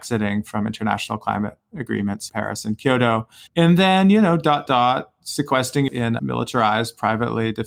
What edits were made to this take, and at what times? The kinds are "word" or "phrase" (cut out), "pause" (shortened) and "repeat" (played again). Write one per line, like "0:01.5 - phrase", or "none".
0:02.3 - word
0:03.5 - pause
0:04.7 - word
0:05.9 - word
0:06.2 - word